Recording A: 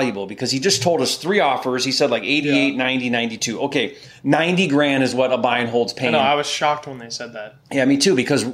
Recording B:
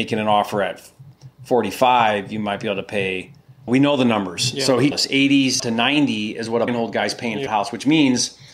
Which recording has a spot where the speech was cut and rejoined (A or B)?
B